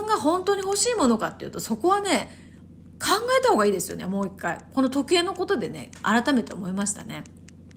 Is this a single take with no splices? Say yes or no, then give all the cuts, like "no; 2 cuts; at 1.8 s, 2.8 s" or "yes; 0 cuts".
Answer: yes; 0 cuts